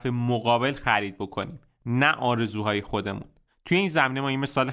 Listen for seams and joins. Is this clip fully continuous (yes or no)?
yes